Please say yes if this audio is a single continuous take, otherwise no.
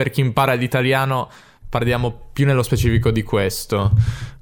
yes